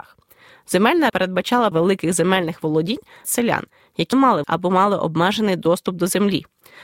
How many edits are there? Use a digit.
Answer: 5